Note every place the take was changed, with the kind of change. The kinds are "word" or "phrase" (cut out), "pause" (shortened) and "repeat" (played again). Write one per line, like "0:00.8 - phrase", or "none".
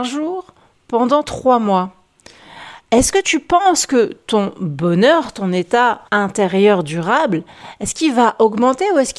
0:06.1 - pause